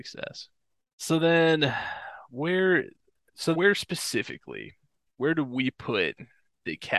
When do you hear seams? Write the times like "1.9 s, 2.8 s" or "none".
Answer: 3.5 s